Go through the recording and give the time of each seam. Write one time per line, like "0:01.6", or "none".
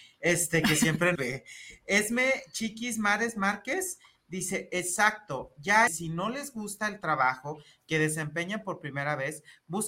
0:01.2
0:05.9